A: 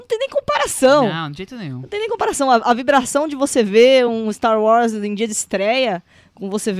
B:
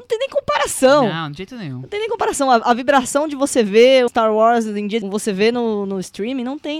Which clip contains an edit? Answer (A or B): B